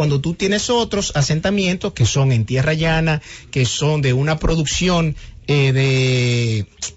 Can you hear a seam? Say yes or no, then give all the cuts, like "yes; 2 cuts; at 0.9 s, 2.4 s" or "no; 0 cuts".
no; 0 cuts